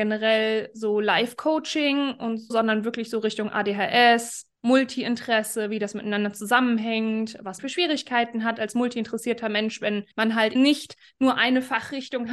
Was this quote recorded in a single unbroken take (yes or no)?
no